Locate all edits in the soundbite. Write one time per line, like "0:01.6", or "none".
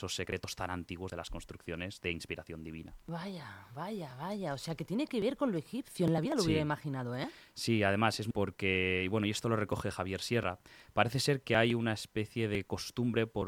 0:08.3